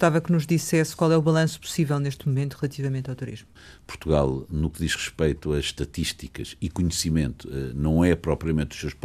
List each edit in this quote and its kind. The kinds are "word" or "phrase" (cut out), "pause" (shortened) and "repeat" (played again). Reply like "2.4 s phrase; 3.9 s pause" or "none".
none